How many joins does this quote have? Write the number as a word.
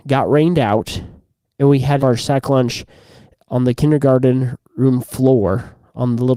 one